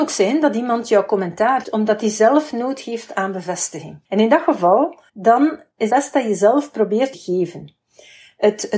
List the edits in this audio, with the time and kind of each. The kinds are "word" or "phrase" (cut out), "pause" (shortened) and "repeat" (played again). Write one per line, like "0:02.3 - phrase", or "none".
0:01.6 - word
0:04.0 - pause
0:05.1 - pause
0:05.9 - word
0:07.1 - phrase